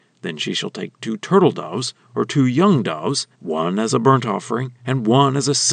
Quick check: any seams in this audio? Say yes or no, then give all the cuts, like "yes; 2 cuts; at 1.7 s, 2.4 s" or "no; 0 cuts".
yes; 2 cuts; at 3.3 s, 4.8 s